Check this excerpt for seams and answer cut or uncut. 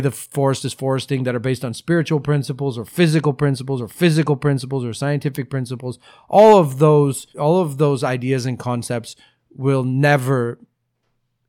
cut